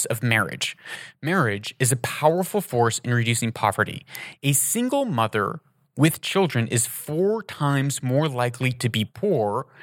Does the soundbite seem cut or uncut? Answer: uncut